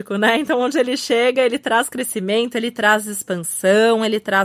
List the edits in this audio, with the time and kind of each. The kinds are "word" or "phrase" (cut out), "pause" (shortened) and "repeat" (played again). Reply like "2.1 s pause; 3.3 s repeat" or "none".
none